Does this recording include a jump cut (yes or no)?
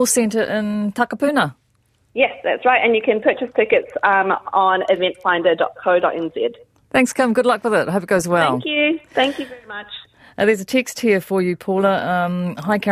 no